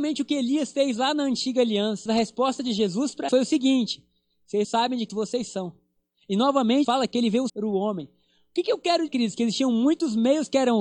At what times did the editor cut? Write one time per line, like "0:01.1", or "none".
0:02.1
0:03.3
0:04.6
0:05.1
0:06.8
0:07.5
0:09.1